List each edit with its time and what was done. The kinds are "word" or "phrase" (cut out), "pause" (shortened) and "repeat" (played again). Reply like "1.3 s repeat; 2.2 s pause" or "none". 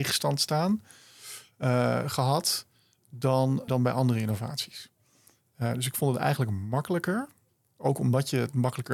3.7 s word; 7.5 s pause

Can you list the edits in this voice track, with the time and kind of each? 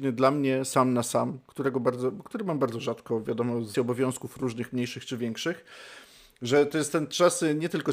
3.7 s word

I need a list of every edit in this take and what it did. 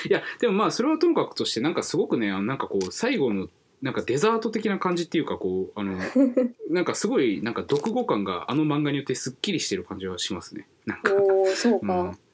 none

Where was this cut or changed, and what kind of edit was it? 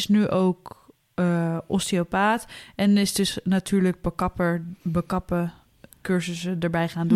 4.8 s pause

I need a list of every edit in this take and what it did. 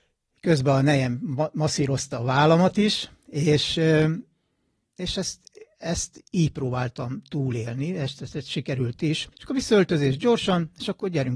3.2 s pause; 9.3 s pause

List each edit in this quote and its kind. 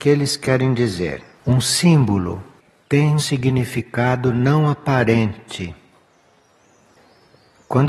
1.3 s pause; 3.2 s word

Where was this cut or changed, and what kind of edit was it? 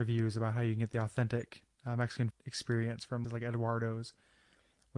2.3 s word; 3.2 s phrase

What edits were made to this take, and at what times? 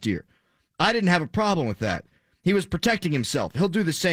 none

